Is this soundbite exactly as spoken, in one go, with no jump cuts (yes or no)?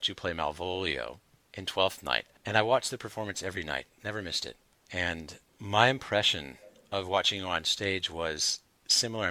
yes